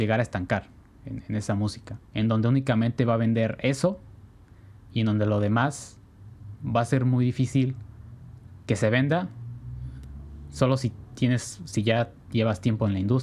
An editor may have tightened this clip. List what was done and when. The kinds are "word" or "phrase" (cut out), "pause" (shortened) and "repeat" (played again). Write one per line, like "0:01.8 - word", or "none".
0:02.0 - pause